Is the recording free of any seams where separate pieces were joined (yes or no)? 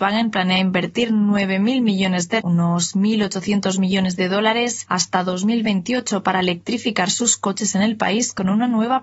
no